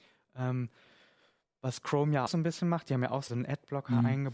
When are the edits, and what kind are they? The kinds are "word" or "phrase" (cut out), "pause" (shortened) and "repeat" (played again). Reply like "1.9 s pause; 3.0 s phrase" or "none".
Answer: 2.3 s word; 3.3 s word

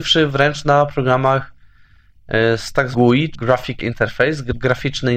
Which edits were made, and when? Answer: 2.9 s word; 3.3 s word; 3.8 s word

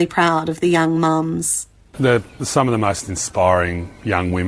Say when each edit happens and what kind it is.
none

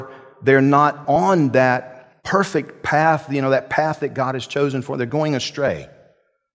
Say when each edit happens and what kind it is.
2.2 s pause

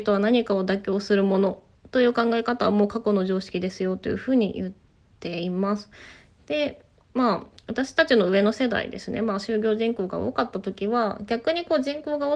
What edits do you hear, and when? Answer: none

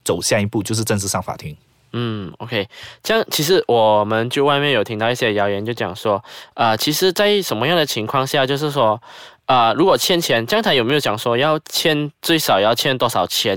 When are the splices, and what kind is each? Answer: none

